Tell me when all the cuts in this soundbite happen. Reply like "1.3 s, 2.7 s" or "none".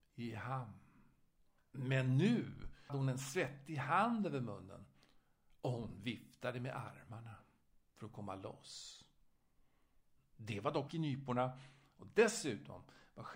2.9 s, 10.9 s